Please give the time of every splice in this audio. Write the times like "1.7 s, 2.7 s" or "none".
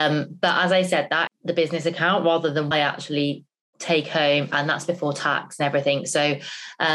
1.3 s, 2.7 s